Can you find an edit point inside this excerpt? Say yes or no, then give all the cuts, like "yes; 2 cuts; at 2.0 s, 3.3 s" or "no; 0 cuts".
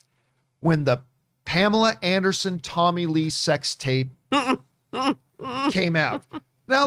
no; 0 cuts